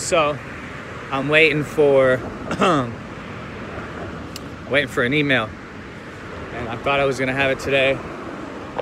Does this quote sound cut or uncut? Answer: uncut